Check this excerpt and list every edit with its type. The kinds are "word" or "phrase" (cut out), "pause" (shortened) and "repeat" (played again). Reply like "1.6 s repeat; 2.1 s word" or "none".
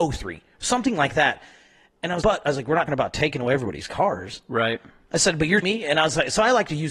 2.2 s word; 2.9 s word; 5.6 s word

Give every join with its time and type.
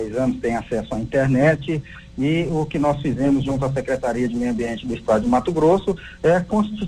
none

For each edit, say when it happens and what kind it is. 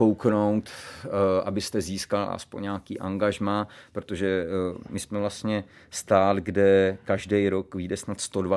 none

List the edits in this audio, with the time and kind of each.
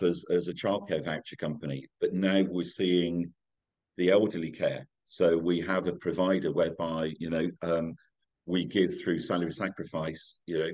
none

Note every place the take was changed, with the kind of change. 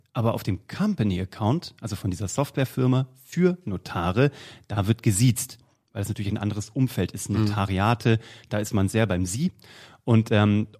none

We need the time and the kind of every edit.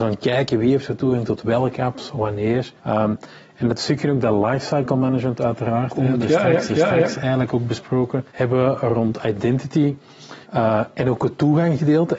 2.8 s pause; 6.2 s word; 6.7 s repeat; 8.3 s pause; 10.4 s pause

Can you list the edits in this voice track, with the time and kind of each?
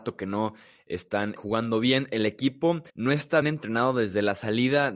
1.4 s word; 2.9 s pause; 3.4 s word

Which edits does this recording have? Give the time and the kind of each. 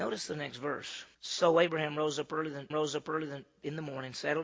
1.1 s pause; 2.7 s repeat

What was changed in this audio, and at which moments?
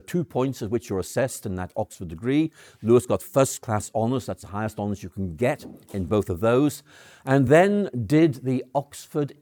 none

